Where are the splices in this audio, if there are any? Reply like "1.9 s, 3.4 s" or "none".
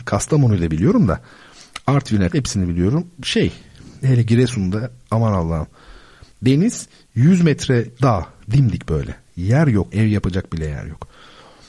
2.3 s, 4.0 s, 8.0 s, 9.9 s